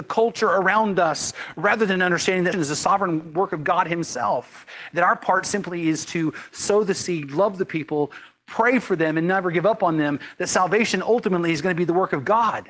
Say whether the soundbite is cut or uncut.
cut